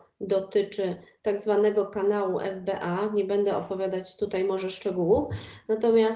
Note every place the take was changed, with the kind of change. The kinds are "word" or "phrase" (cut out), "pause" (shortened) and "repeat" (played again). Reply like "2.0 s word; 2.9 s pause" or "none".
none

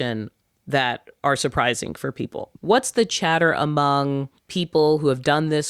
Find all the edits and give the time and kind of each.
2.6 s pause; 4.4 s pause

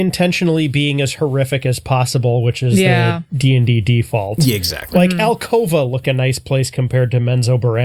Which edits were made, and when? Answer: 6.0 s word

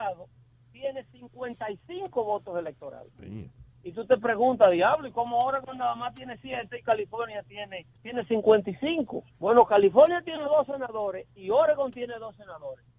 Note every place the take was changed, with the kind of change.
8.0 s pause; 9.3 s pause

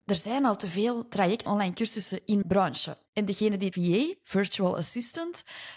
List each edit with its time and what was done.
1.5 s word; 2.4 s word; 3.1 s pause; 3.7 s phrase

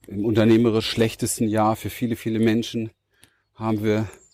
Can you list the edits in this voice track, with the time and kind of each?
none

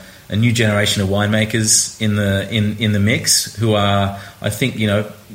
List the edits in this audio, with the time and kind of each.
none

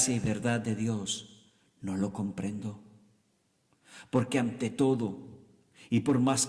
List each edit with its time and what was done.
none

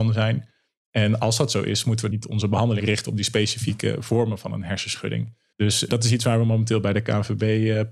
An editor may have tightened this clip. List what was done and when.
2.1 s word; 2.8 s word; 5.5 s pause

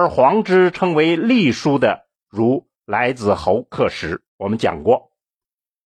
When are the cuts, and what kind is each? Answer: 2.7 s pause; 4.3 s pause

